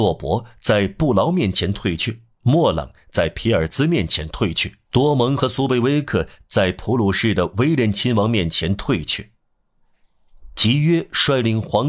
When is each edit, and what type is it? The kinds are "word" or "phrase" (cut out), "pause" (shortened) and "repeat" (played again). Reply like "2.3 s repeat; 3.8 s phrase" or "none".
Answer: 2.3 s pause; 4.8 s pause